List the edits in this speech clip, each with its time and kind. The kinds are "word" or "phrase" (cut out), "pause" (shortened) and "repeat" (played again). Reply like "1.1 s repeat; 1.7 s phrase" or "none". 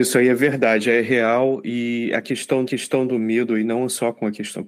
2.6 s repeat

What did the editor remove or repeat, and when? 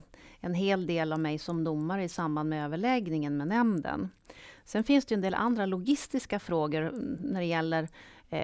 none

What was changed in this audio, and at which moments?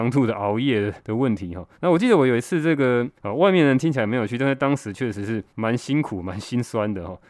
1.0 s pause; 1.7 s pause; 3.2 s pause; 5.5 s pause

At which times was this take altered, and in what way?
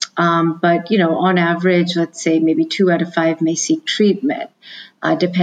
none

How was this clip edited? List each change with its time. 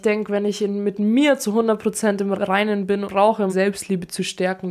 2.3 s word; 3.1 s phrase; 3.5 s word

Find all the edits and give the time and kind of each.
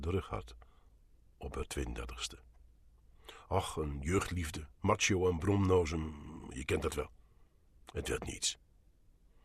4.7 s pause

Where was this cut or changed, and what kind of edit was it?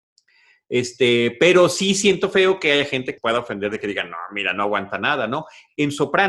3.2 s word

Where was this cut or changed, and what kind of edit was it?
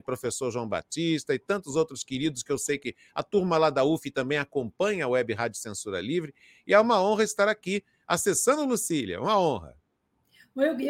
none

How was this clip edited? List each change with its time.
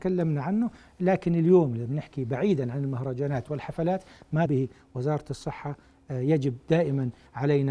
4.5 s word

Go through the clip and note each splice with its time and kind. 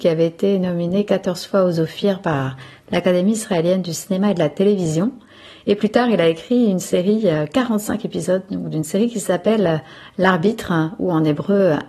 none

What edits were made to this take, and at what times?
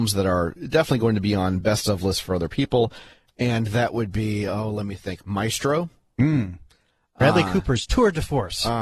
none

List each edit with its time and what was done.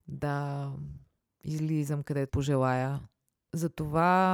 2.3 s word

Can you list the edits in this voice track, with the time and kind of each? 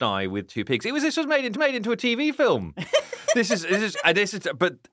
1.5 s repeat

